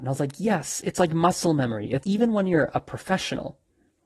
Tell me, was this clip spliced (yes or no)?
yes